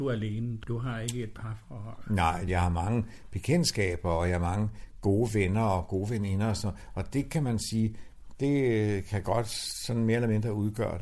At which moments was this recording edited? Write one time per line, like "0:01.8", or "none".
0:02.5